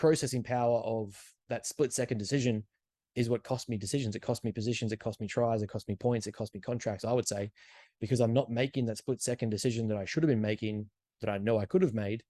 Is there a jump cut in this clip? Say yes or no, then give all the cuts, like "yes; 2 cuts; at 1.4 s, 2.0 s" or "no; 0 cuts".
no; 0 cuts